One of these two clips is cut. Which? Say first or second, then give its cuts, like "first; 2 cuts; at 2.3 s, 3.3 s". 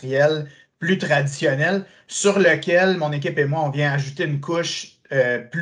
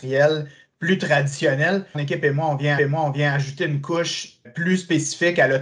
second; 3 cuts; at 1.9 s, 2.8 s, 4.4 s